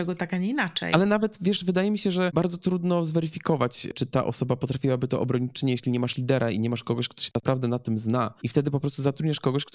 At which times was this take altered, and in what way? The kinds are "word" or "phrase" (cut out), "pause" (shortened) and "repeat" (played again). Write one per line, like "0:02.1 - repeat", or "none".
none